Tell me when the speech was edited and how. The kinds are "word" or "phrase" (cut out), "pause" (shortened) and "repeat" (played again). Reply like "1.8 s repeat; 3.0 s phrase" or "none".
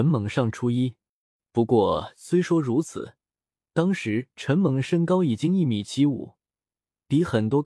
none